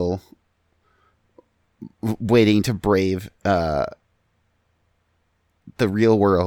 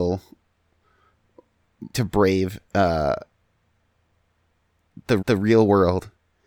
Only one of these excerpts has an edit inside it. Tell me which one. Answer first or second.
second